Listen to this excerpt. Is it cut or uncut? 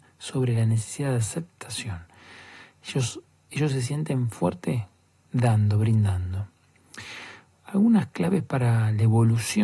uncut